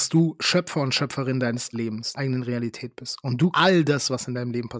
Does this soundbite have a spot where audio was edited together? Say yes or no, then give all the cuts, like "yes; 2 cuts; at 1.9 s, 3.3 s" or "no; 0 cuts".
yes; 3 cuts; at 1.7 s, 2.2 s, 3.5 s